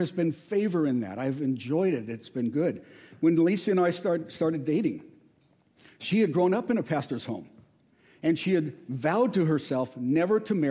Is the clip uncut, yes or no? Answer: yes